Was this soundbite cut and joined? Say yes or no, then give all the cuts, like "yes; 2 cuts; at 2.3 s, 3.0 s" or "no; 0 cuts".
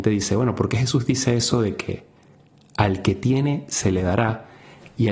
no; 0 cuts